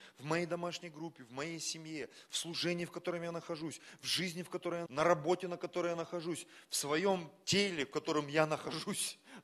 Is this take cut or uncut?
cut